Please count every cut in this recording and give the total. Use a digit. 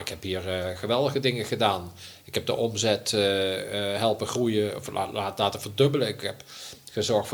0